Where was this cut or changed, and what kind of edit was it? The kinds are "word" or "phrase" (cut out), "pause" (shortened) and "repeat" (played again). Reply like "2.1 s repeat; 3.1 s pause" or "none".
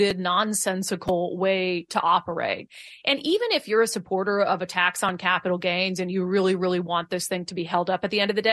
none